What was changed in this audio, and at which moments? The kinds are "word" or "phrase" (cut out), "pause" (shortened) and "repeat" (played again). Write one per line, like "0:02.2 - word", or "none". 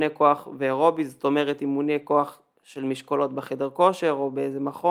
none